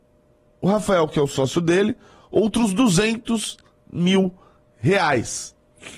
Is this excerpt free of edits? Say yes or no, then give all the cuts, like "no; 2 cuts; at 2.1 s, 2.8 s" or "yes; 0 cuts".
yes; 0 cuts